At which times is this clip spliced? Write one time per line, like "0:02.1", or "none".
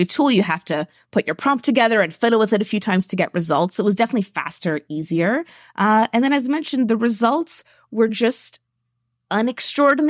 none